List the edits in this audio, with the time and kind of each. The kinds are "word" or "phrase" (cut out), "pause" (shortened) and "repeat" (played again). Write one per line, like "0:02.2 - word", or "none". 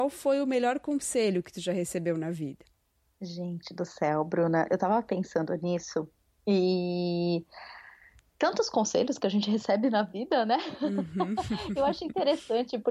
none